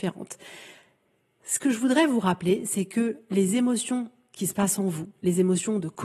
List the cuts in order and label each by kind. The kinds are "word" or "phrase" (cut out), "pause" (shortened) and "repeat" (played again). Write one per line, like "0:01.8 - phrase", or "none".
none